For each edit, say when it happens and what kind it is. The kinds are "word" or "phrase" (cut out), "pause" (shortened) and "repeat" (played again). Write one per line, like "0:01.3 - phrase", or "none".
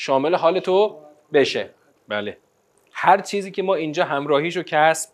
none